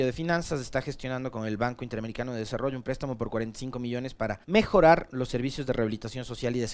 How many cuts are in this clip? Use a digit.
1